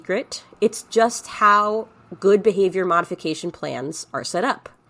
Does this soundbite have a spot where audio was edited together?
no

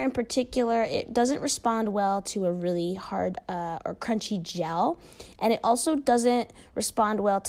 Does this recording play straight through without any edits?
yes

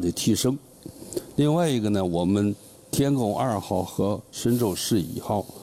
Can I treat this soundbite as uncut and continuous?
yes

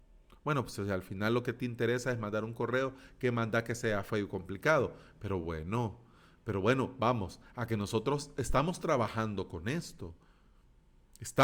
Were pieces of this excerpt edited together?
no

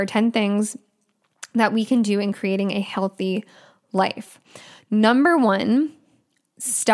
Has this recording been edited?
no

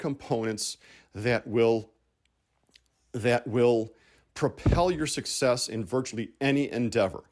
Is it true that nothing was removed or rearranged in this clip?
yes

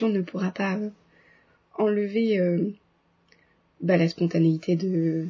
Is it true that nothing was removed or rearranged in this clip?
yes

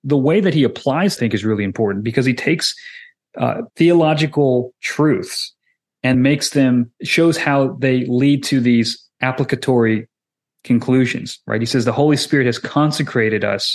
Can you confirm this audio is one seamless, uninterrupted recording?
no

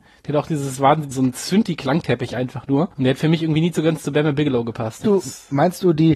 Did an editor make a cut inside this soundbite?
yes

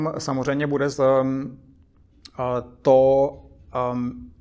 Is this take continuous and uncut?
no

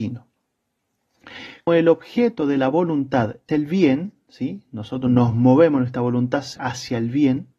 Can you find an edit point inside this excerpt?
yes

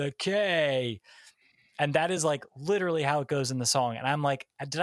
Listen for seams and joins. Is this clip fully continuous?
yes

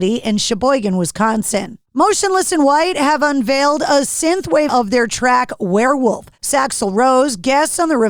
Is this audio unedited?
no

